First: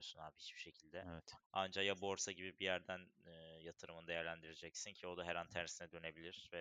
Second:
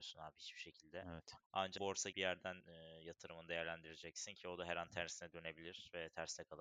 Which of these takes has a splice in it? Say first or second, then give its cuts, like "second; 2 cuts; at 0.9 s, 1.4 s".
second; 3 cuts; at 1.8 s, 2.1 s, 2.6 s